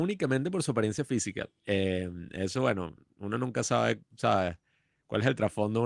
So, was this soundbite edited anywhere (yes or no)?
yes